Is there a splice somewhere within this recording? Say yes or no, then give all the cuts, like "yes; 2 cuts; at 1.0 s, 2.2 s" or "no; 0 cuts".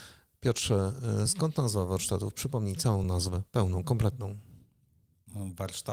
no; 0 cuts